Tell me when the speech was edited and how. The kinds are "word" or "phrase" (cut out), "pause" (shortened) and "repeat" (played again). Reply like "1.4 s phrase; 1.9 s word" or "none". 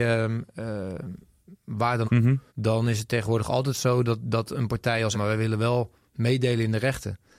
2.0 s word; 2.5 s pause; 5.1 s phrase